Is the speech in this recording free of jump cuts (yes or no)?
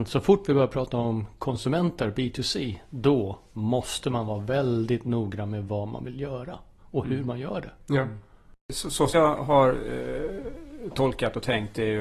no